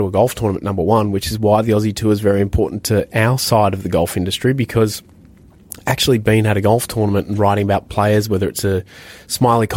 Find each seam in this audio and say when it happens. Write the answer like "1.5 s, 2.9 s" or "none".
none